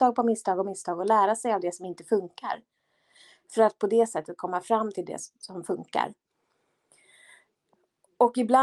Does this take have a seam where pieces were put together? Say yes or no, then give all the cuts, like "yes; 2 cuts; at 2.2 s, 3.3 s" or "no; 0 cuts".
no; 0 cuts